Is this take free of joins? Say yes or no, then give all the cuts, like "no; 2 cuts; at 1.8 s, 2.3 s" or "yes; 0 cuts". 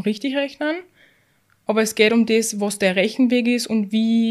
yes; 0 cuts